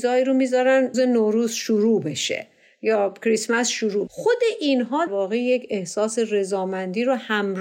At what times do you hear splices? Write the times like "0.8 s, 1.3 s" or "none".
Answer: 0.9 s, 4.1 s, 5.1 s